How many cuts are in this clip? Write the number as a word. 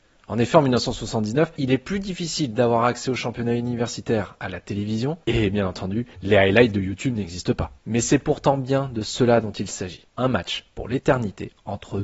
five